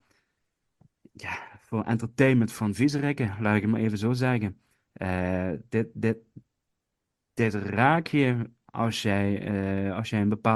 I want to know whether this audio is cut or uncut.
uncut